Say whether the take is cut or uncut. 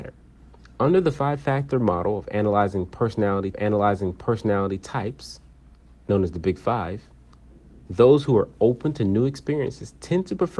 cut